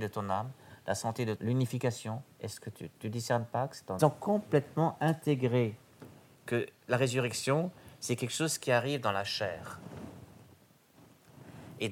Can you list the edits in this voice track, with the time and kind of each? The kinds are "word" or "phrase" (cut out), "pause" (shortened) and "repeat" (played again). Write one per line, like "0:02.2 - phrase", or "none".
0:01.4 - phrase
0:02.3 - pause
0:02.9 - word
0:04.0 - phrase

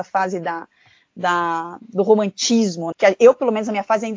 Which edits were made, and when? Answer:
0:02.9 - word

